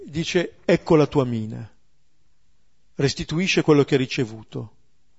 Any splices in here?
no; 0 cuts

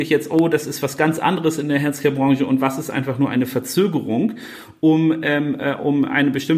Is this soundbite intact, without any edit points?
yes; 0 cuts

